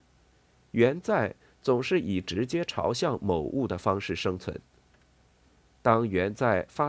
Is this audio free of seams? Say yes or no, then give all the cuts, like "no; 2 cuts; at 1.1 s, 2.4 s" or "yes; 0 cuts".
yes; 0 cuts